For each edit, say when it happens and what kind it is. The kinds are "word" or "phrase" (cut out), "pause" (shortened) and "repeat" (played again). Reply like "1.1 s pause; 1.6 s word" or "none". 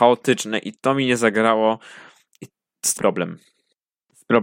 3.0 s word